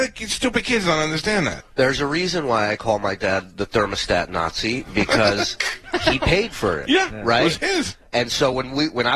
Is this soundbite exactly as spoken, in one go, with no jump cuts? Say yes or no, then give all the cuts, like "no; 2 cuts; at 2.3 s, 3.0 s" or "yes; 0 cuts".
yes; 0 cuts